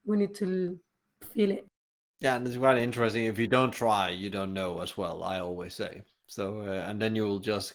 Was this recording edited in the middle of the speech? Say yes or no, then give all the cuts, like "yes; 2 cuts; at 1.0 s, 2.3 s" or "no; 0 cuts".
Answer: no; 0 cuts